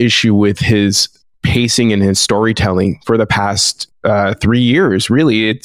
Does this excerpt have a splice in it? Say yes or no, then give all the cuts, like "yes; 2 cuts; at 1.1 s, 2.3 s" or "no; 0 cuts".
no; 0 cuts